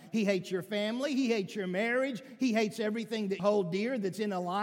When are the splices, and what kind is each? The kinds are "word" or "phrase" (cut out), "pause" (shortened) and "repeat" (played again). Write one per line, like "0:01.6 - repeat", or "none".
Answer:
0:03.4 - word

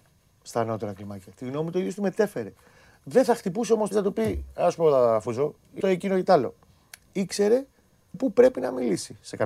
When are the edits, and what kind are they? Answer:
0:03.9 - word
0:05.8 - word
0:08.1 - word

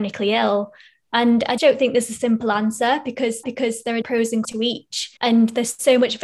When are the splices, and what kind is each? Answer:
0:01.6 - word
0:03.4 - repeat
0:04.0 - word
0:04.4 - word
0:05.2 - pause

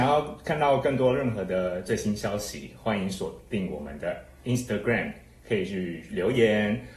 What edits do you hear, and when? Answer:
none

